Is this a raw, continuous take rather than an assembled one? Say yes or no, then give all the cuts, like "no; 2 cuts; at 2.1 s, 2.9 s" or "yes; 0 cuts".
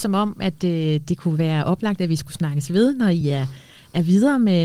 yes; 0 cuts